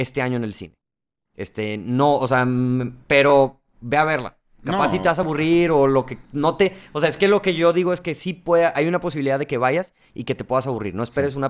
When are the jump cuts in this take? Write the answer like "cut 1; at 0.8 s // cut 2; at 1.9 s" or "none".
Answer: cut 1; at 3.0 s // cut 2; at 6.2 s